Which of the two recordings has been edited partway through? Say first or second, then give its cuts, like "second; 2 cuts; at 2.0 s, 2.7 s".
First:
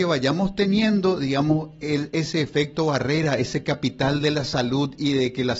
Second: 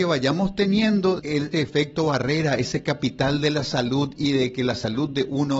second; 2 cuts; at 1.2 s, 1.5 s